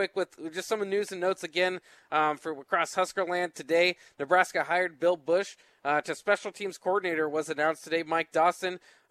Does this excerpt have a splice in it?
no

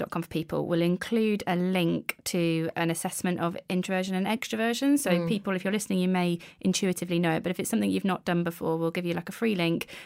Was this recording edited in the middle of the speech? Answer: no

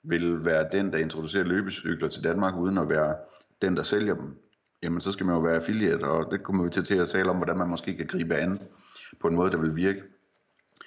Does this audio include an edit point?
yes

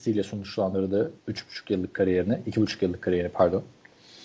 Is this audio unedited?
no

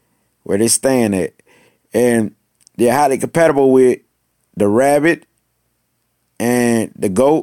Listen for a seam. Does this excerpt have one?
no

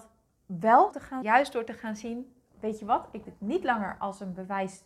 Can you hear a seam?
yes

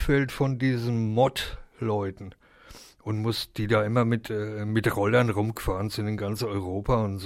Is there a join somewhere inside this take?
no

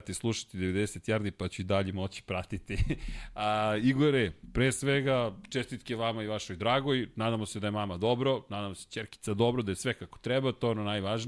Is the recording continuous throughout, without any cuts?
yes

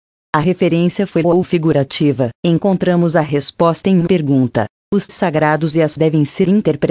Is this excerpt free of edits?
no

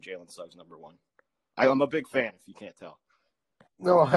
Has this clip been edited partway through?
no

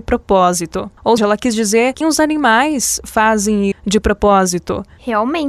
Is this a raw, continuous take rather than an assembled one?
no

